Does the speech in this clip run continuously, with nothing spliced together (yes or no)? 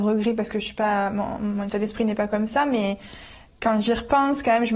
yes